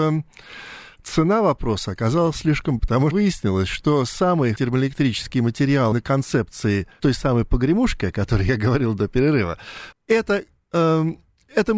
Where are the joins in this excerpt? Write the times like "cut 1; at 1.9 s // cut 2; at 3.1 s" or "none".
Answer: cut 1; at 2.8 s // cut 2; at 3.1 s // cut 3; at 4.6 s // cut 4; at 5.9 s // cut 5; at 7.0 s // cut 6; at 9.9 s